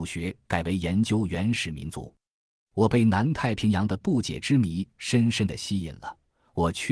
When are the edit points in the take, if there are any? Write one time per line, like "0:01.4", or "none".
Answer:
none